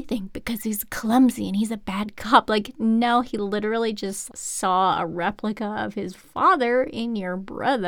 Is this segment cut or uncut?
cut